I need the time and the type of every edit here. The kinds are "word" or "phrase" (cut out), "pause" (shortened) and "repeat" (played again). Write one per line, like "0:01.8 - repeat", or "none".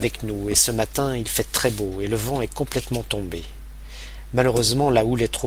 none